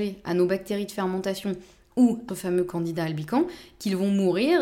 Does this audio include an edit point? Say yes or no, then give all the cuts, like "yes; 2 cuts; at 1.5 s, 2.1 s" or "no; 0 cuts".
yes; 1 cut; at 2.3 s